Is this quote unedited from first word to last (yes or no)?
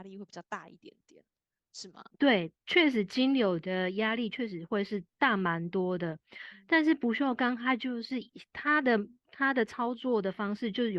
no